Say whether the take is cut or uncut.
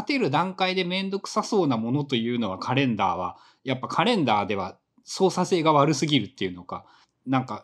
uncut